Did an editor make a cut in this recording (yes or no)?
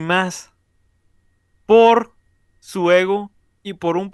no